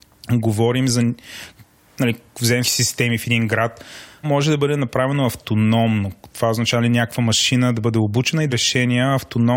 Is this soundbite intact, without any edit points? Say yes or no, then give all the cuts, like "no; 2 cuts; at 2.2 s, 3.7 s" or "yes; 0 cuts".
no; 3 cuts; at 2.6 s, 4.2 s, 8.5 s